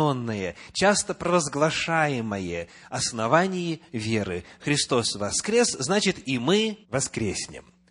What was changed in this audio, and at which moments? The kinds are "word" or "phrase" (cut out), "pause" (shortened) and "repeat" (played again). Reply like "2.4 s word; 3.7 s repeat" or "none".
6.8 s pause